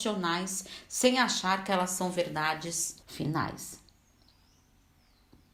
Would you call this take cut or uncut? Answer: cut